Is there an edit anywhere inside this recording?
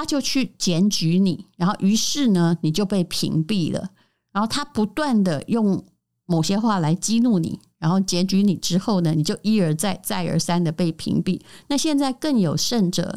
no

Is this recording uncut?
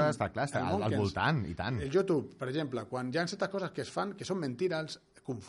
yes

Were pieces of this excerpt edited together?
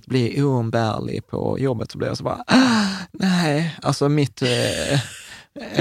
no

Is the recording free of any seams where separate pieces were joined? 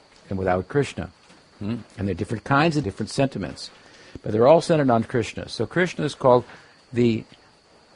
no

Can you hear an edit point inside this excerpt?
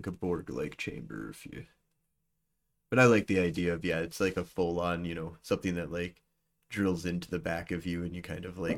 no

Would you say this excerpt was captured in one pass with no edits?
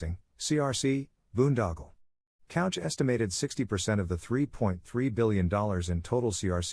yes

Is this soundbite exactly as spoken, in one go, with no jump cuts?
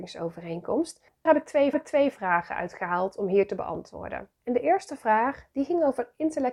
no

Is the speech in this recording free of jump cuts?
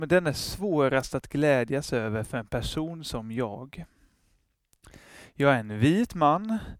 yes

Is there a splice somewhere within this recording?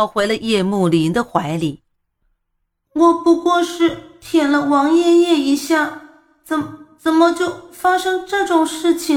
no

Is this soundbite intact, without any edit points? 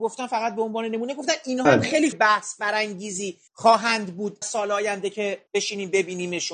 no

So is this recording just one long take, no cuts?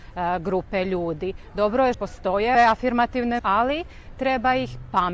no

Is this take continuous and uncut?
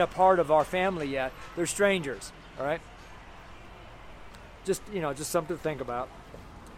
yes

